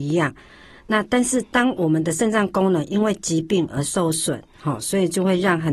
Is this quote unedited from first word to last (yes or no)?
yes